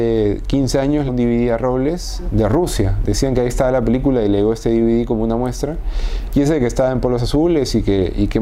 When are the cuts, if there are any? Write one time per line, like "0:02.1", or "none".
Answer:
0:01.1